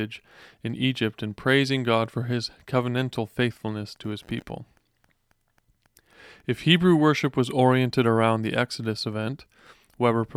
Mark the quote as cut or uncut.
uncut